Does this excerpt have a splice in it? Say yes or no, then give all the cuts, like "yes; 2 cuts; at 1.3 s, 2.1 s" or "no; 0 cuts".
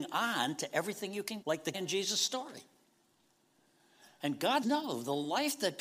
yes; 3 cuts; at 1.4 s, 1.7 s, 4.6 s